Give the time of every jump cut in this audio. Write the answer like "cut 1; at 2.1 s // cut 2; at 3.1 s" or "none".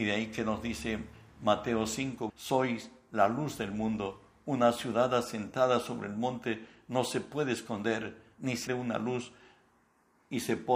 cut 1; at 2.3 s // cut 2; at 8.7 s